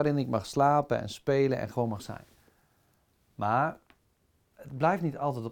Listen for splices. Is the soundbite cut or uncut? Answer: uncut